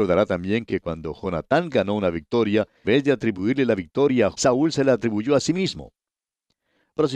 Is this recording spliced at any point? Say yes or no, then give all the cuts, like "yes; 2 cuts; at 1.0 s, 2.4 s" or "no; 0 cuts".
yes; 2 cuts; at 2.8 s, 4.3 s